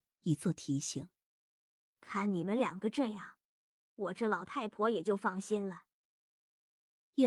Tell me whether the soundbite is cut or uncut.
uncut